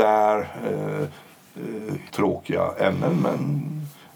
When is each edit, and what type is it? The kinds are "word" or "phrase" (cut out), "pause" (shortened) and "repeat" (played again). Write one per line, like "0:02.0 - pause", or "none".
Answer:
0:02.1 - word